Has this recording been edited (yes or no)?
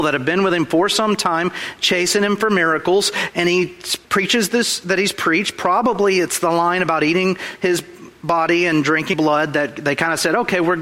yes